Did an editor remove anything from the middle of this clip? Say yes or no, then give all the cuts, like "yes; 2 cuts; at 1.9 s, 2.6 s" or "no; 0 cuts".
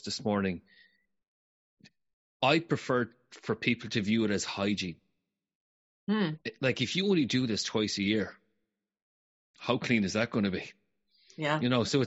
no; 0 cuts